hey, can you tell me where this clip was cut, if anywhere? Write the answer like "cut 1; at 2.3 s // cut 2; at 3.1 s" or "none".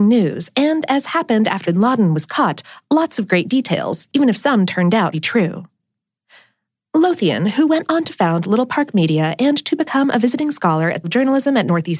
cut 1; at 1.6 s // cut 2; at 5.1 s // cut 3; at 11.0 s